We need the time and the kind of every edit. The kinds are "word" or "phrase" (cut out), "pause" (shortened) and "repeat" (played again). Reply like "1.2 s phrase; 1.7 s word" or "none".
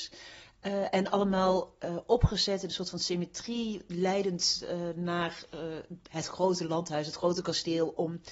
none

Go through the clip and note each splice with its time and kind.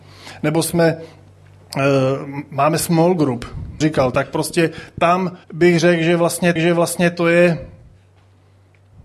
3.8 s phrase; 5.4 s pause; 6.6 s repeat

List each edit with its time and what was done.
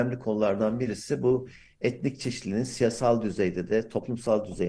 none

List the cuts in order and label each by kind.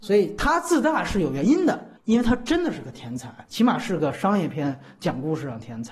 2.0 s pause; 3.4 s pause

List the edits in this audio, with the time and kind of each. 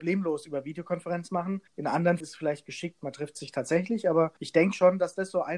1.7 s pause; 2.2 s word; 4.4 s pause

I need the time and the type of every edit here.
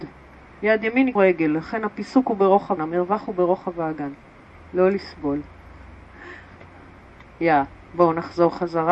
1.2 s word; 2.8 s word; 4.5 s pause

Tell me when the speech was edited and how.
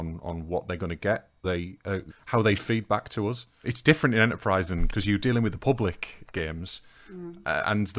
1.4 s word; 2.1 s word; 2.6 s word; 3.6 s word; 4.9 s word; 6.2 s word

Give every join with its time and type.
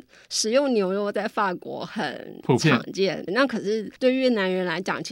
3.3 s word; 4.0 s pause

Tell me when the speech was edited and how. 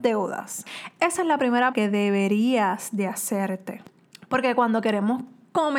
1.7 s word

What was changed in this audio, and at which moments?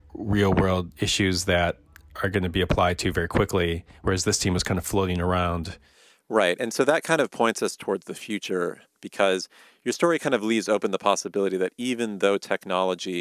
none

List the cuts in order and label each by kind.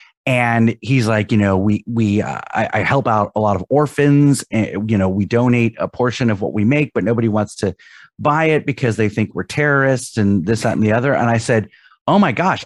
none

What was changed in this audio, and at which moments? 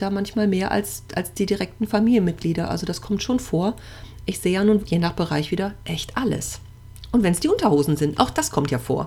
4.8 s word

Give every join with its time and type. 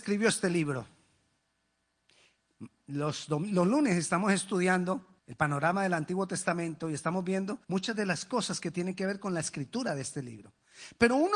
5.2 s pause; 7.6 s pause

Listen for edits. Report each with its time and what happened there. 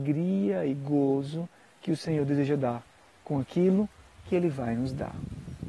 none

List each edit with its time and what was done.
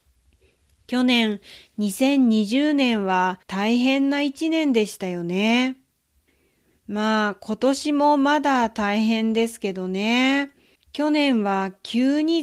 3.4 s pause; 10.8 s pause

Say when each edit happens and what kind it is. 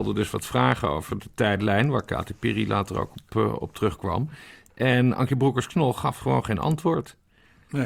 none

